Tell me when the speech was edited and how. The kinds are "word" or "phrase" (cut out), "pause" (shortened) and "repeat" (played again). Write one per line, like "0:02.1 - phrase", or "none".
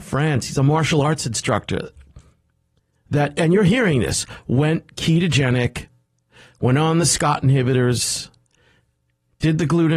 none